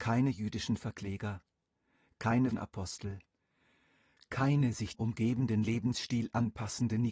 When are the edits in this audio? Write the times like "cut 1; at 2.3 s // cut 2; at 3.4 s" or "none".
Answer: cut 1; at 2.5 s // cut 2; at 4.9 s